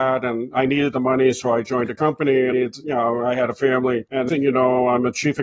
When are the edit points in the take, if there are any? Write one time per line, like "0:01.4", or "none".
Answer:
0:02.5
0:04.3